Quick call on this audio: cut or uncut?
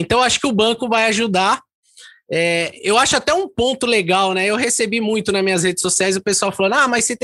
uncut